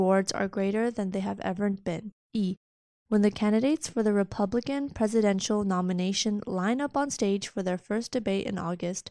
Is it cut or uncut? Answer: cut